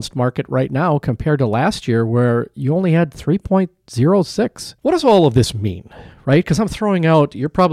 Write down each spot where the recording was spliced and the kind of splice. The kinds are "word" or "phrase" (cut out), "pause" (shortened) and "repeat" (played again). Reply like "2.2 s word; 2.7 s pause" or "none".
4.8 s pause

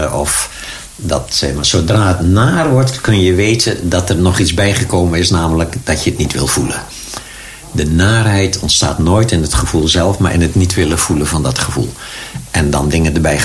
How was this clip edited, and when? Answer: none

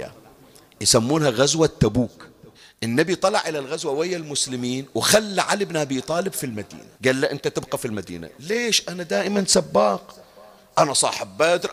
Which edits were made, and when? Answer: 2.5 s pause; 6.9 s pause

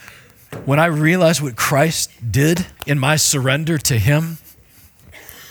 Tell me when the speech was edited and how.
2.8 s pause

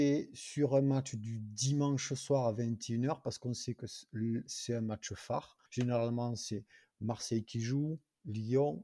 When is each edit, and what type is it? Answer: 5.7 s pause

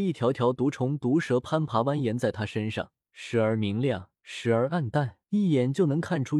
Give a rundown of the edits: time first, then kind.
3.0 s pause; 4.2 s pause; 5.2 s pause

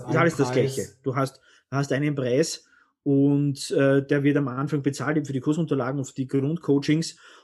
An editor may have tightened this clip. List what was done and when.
none

